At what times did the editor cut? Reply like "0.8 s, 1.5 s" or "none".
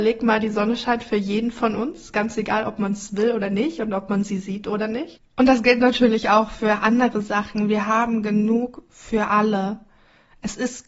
none